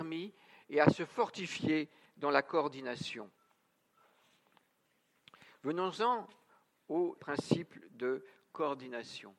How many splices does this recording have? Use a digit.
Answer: 1